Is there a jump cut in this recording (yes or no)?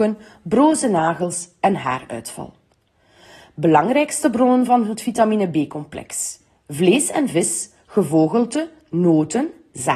no